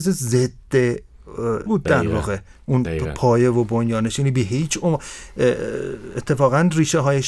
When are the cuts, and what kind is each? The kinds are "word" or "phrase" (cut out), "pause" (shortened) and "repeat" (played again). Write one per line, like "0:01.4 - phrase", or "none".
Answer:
0:01.7 - word